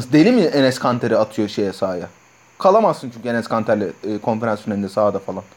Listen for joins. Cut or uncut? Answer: uncut